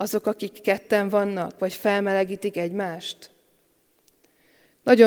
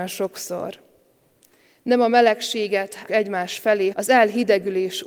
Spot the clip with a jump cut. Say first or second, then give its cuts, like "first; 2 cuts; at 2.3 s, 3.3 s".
second; 2 cuts; at 3.1 s, 3.9 s